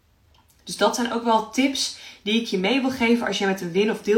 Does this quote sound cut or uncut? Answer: uncut